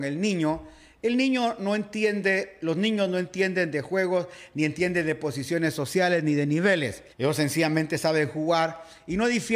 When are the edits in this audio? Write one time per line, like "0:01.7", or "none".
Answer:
0:07.1